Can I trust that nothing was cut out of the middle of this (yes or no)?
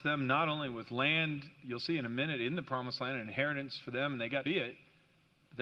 no